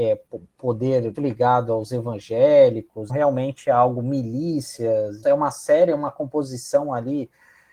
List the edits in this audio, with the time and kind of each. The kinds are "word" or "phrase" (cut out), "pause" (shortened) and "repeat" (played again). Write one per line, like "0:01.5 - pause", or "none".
0:01.1 - word
0:03.1 - word
0:05.2 - word